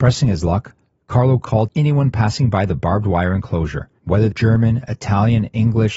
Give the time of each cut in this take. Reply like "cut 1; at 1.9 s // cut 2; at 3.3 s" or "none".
cut 1; at 1.7 s // cut 2; at 4.3 s